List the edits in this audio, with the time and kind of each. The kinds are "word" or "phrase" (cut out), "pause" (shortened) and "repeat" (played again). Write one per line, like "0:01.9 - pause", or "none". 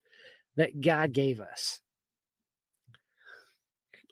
none